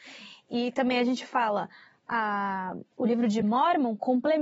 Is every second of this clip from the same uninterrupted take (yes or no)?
yes